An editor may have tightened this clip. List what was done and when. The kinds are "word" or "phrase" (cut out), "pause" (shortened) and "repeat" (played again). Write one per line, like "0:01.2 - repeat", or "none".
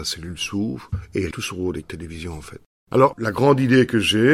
0:01.3 - word
0:01.8 - word
0:03.1 - word